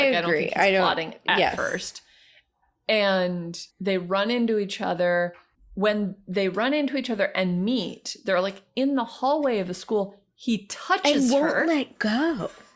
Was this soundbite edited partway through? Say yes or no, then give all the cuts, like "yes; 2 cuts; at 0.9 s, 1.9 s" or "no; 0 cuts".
yes; 2 cuts; at 3.7 s, 5.5 s